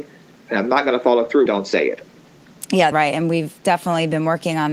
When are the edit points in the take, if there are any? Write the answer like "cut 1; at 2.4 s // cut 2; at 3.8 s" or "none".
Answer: cut 1; at 1.5 s // cut 2; at 2.9 s